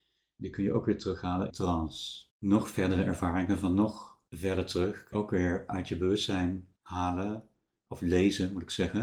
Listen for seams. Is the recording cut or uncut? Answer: cut